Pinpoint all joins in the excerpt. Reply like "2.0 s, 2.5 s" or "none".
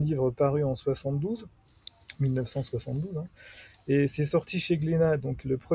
none